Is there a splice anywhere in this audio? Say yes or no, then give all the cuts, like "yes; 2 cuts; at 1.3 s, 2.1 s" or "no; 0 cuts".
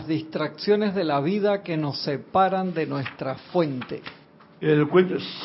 yes; 1 cut; at 4.2 s